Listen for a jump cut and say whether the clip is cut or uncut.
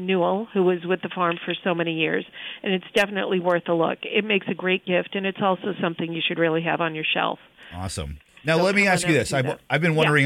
uncut